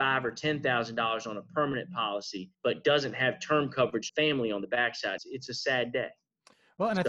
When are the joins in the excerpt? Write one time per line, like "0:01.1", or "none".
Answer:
0:02.5
0:04.1
0:05.2